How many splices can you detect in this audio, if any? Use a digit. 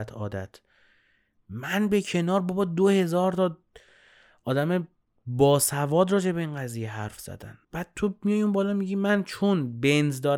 2